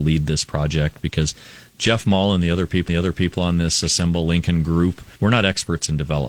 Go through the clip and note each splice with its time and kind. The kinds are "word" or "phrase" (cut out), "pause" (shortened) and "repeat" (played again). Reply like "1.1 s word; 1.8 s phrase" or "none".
2.9 s repeat; 5.2 s pause